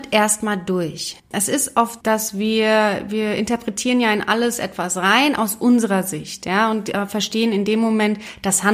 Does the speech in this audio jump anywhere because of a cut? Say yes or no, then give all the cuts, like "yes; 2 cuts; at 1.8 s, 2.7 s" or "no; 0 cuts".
yes; 2 cuts; at 1.2 s, 2.0 s